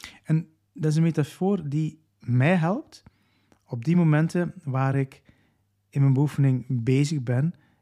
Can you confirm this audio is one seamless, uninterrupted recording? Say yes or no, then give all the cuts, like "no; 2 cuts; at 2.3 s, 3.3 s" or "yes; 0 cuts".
yes; 0 cuts